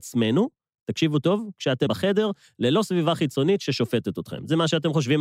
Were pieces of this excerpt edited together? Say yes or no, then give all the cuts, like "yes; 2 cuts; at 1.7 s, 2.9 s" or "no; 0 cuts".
yes; 1 cut; at 1.9 s